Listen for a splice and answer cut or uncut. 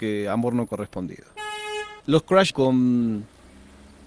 cut